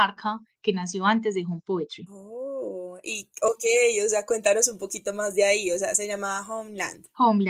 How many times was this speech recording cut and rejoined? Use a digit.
0